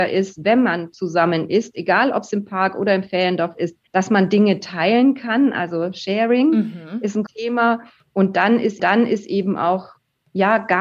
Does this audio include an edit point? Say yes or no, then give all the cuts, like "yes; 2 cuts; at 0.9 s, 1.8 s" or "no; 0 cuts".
yes; 3 cuts; at 3.9 s, 7.3 s, 8.8 s